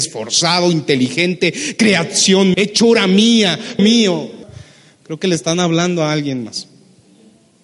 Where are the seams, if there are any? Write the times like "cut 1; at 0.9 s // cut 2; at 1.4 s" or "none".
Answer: cut 1; at 2.5 s // cut 2; at 3.8 s // cut 3; at 4.4 s